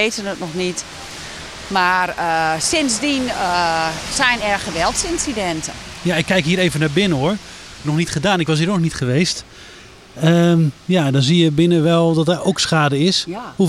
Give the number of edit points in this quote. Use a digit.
2